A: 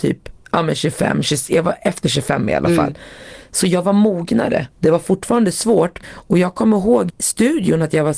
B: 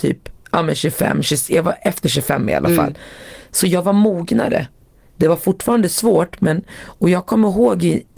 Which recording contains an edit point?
A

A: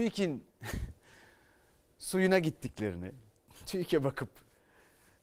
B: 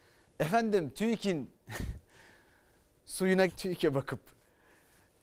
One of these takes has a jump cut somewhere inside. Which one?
B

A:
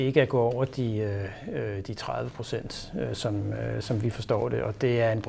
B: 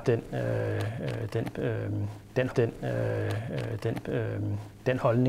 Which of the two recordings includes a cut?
B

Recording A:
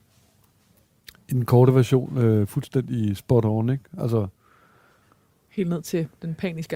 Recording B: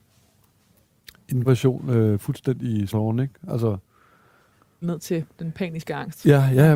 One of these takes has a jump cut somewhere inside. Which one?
B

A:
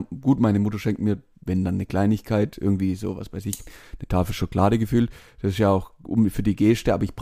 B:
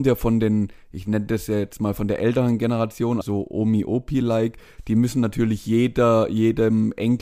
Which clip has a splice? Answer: B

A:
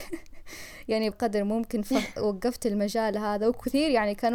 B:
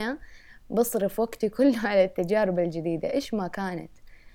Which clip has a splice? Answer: A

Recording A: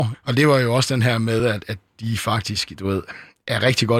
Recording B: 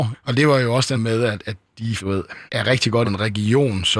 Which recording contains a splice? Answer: B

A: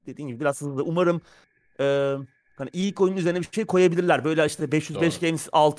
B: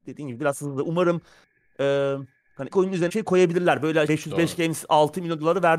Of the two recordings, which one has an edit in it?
B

